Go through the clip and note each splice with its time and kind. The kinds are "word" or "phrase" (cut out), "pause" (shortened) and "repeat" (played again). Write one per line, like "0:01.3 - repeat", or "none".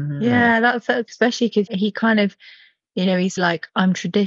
0:01.1 - word
0:01.7 - word
0:03.4 - word

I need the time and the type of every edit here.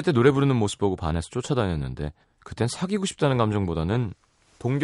0:02.2 - pause

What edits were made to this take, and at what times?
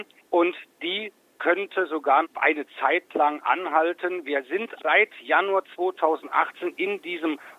0:02.2 - word
0:04.8 - word

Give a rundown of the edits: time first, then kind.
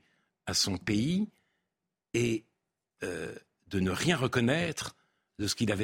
none

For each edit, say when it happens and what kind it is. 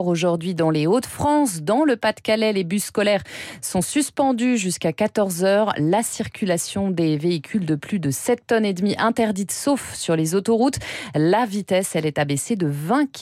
none

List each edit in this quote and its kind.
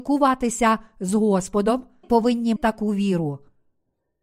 0:02.0 - word
0:02.6 - word

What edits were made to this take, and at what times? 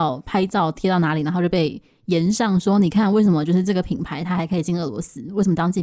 none

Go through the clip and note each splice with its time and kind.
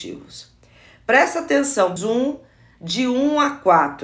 0:02.0 - word

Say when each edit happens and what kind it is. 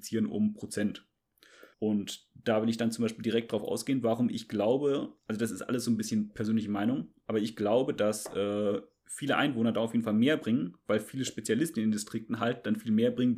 0:01.7 - pause
0:05.2 - pause

